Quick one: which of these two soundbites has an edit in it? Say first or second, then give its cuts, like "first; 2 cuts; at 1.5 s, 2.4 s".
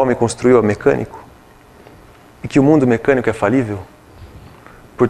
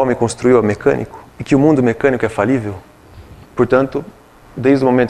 second; 2 cuts; at 1.3 s, 3.4 s